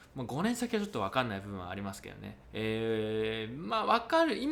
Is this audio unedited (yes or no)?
no